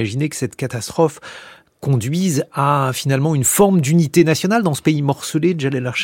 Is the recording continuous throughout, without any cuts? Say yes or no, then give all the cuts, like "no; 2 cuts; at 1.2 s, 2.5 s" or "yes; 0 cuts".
yes; 0 cuts